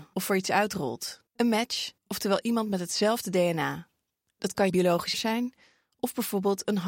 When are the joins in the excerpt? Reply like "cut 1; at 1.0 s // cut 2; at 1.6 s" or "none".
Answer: cut 1; at 1.3 s // cut 2; at 2.0 s // cut 3; at 4.3 s // cut 4; at 4.7 s // cut 5; at 5.1 s